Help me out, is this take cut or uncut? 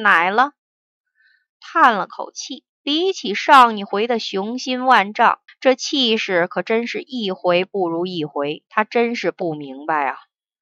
cut